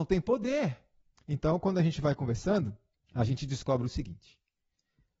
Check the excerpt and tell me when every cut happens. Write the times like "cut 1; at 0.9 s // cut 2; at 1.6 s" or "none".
cut 1; at 1.0 s // cut 2; at 3.0 s